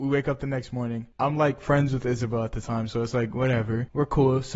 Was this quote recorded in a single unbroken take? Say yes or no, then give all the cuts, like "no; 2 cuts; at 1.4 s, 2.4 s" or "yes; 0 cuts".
yes; 0 cuts